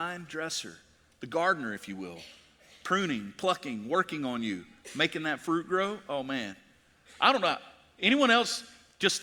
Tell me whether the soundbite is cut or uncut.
uncut